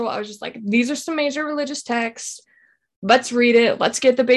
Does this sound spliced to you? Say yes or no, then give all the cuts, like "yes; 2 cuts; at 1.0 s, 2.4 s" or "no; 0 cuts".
no; 0 cuts